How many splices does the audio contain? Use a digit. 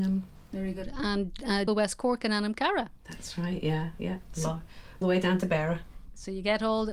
2